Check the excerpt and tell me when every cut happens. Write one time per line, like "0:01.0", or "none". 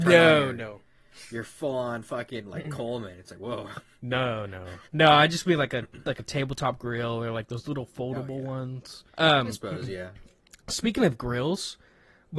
0:04.9
0:09.1
0:10.5